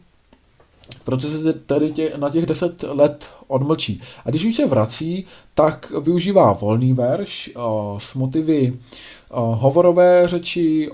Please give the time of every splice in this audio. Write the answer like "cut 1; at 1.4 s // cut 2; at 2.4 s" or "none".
none